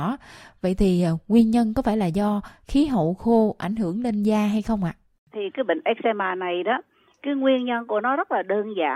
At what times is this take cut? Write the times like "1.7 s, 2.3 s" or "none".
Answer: none